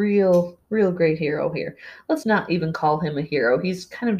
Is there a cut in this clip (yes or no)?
yes